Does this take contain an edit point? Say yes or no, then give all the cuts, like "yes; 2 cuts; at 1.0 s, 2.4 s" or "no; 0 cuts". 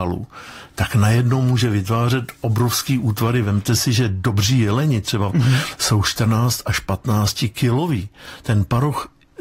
yes; 1 cut; at 5.3 s